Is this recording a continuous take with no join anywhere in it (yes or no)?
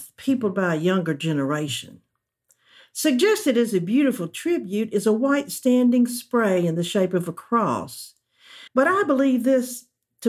no